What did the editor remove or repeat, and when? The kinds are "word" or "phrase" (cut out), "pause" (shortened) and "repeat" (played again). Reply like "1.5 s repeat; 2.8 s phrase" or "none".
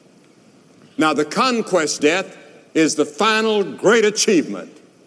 2.0 s word